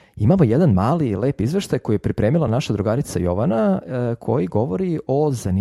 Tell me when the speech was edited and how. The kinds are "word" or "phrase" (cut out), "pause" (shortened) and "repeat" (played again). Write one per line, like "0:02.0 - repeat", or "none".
none